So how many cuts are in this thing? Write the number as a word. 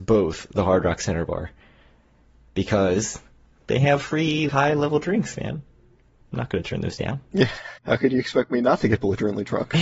two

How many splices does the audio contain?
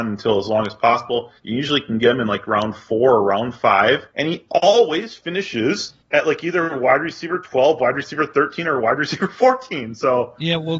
three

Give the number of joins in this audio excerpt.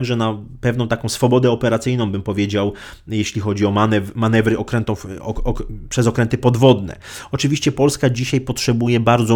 zero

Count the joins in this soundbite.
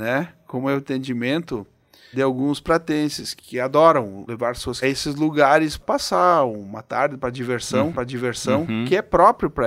five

